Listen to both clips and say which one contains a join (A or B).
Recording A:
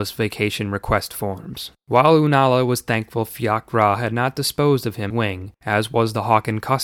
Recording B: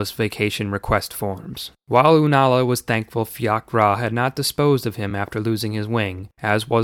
A